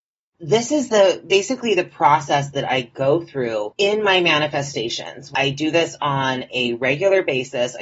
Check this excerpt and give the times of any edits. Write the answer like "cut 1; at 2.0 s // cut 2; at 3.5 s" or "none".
none